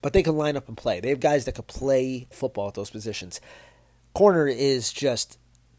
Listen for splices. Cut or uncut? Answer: cut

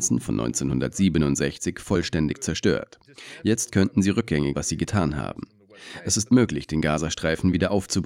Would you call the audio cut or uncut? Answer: cut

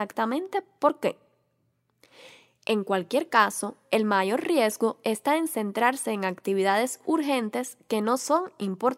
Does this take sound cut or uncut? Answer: uncut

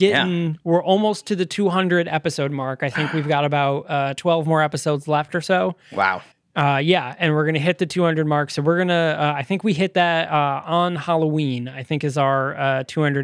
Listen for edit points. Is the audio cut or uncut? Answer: cut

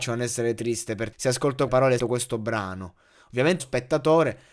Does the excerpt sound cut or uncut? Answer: cut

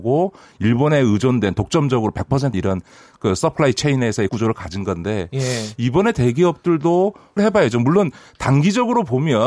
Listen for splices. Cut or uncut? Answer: cut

